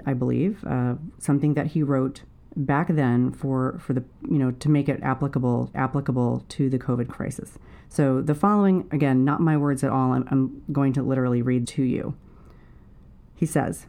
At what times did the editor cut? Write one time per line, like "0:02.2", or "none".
0:05.7
0:07.8
0:11.6